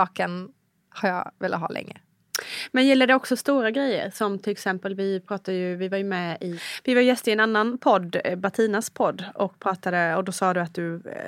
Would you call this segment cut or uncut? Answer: uncut